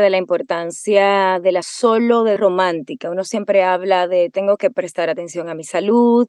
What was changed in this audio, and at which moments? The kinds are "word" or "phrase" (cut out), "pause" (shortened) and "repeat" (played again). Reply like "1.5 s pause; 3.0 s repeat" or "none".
1.6 s phrase; 2.4 s phrase